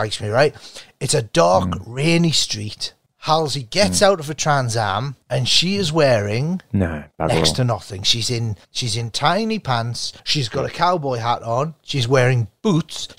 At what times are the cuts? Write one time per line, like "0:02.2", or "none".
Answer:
0:05.2
0:08.6
0:10.2